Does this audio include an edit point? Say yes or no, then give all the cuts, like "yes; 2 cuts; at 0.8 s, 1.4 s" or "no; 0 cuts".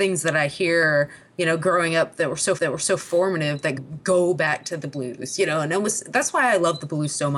yes; 2 cuts; at 2.6 s, 3.8 s